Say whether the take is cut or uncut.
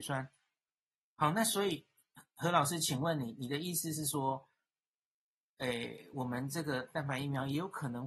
uncut